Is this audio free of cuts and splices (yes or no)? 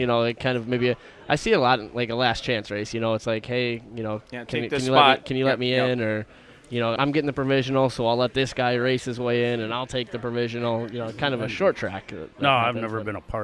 no